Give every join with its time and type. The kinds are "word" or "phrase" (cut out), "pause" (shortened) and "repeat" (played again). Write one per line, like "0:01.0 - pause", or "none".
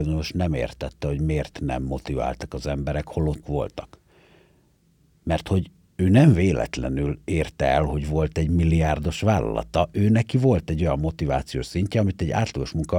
0:03.4 - word